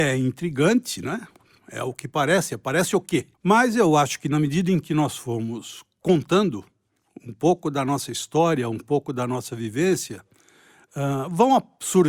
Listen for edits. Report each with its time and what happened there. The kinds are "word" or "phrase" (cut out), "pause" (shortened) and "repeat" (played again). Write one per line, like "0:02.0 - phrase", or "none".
0:03.3 - pause

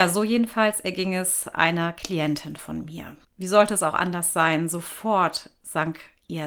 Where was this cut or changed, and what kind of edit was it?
0:03.2 - pause

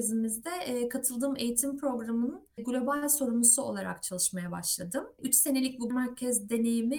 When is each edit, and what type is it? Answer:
0:05.9 - word

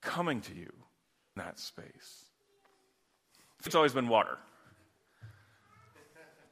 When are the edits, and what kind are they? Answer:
0:01.4 - word
0:03.7 - word

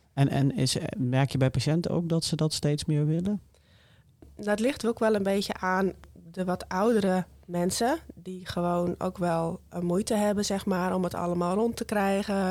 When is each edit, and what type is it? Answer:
none

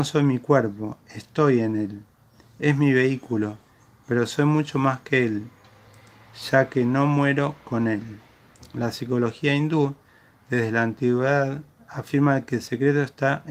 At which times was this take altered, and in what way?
none

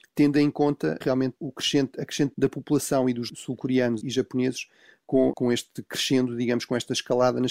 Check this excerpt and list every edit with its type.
0:01.0 - word
0:01.4 - word
0:02.3 - word
0:03.3 - word
0:04.0 - word
0:05.3 - word

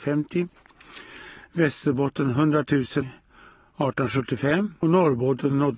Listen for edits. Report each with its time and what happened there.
0:03.0 - word
0:04.8 - word

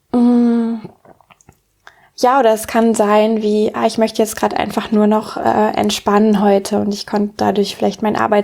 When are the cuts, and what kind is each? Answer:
none

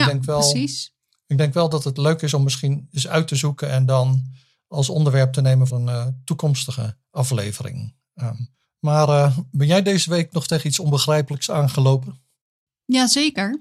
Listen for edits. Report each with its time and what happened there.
0:05.7 - word

